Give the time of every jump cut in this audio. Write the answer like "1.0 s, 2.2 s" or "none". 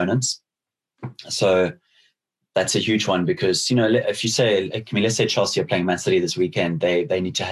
none